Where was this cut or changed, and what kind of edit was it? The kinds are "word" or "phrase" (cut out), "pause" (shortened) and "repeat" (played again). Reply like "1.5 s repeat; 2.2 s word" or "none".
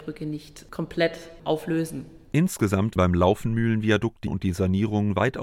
3.0 s word; 4.3 s word